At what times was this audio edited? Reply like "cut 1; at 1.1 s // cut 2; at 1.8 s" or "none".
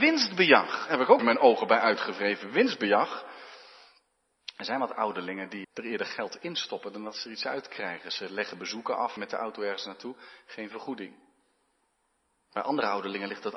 cut 1; at 1.2 s // cut 2; at 5.6 s // cut 3; at 9.2 s